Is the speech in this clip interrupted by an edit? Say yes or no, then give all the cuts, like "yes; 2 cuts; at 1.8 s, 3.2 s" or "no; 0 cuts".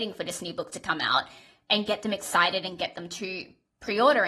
no; 0 cuts